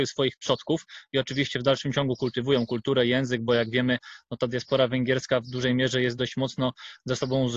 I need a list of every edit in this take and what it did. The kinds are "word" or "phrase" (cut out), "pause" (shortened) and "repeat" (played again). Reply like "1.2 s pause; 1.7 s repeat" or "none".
none